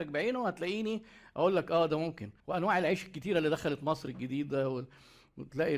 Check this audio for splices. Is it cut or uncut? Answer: cut